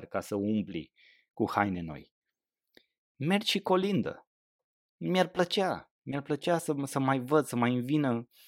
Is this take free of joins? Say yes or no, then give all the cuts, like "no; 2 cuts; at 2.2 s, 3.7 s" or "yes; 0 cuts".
yes; 0 cuts